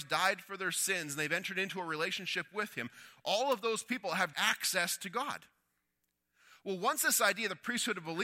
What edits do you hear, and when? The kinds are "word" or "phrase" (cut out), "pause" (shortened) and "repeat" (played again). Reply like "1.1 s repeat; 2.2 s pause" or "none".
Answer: 4.3 s word